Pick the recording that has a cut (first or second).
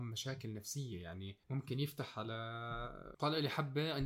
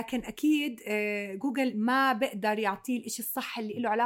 first